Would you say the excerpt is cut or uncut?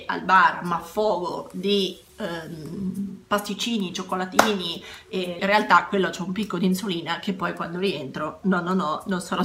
cut